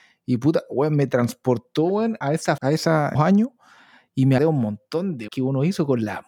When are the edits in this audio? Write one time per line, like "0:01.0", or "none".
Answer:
0:02.2
0:02.6
0:03.1
0:04.4
0:05.3